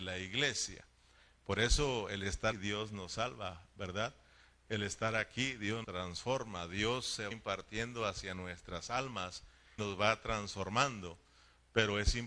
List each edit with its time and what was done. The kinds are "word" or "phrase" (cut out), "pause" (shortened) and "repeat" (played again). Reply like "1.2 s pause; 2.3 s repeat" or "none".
2.5 s word; 5.8 s word; 7.3 s word; 9.8 s word